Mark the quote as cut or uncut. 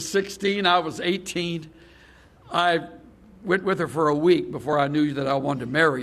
uncut